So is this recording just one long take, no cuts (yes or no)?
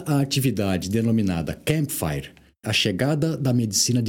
no